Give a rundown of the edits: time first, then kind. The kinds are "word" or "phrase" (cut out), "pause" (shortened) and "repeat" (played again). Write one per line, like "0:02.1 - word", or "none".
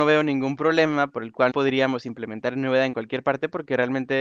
0:01.5 - word